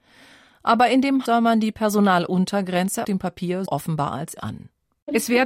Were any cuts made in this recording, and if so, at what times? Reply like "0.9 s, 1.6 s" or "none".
1.3 s, 3.0 s, 3.7 s, 4.4 s

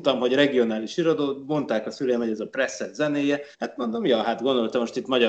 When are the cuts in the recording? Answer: 3.5 s

